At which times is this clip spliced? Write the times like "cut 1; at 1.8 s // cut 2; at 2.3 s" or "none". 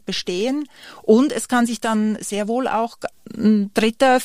none